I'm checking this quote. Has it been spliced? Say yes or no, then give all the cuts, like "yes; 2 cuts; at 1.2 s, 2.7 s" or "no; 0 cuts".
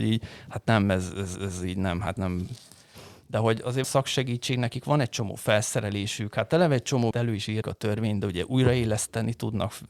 yes; 5 cuts; at 1.3 s, 2.2 s, 3.8 s, 7.1 s, 7.6 s